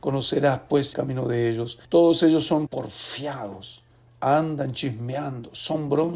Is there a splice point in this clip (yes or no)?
yes